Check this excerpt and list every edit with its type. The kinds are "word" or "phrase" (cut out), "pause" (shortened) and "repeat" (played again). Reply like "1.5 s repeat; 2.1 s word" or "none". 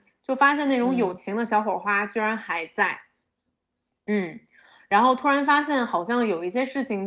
none